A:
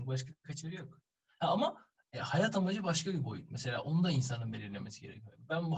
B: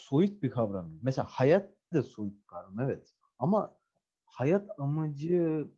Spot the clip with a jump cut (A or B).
B